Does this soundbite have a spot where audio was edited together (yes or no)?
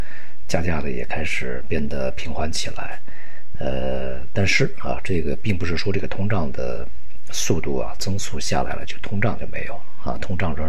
no